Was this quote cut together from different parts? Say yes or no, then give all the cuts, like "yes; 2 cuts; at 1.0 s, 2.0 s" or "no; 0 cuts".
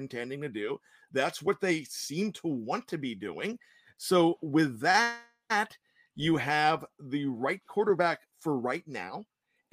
no; 0 cuts